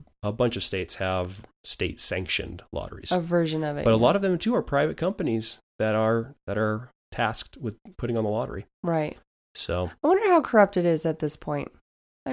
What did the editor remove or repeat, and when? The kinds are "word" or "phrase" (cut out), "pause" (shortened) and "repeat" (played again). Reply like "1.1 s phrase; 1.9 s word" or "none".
none